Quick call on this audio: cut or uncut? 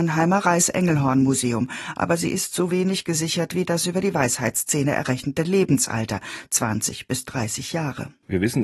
uncut